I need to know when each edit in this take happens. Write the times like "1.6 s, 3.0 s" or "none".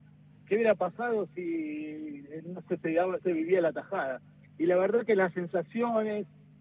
3.2 s